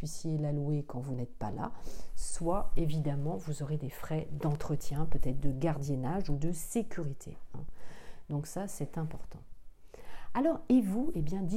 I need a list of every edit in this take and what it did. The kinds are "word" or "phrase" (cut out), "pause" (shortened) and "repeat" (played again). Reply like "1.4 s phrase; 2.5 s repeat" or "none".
none